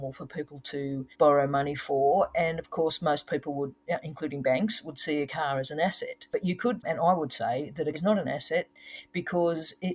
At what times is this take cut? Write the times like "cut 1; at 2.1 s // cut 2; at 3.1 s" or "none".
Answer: cut 1; at 1.1 s // cut 2; at 6.8 s // cut 3; at 7.9 s